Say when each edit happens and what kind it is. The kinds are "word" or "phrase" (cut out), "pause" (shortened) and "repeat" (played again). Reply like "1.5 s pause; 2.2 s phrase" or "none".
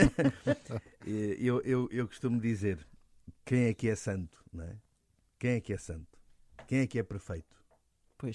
none